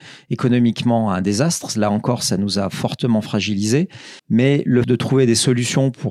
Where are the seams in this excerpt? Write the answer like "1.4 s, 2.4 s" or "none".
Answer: 4.2 s, 4.8 s